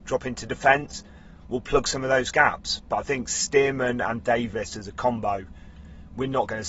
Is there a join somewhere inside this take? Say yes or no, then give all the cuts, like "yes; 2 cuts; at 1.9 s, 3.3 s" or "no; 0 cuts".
no; 0 cuts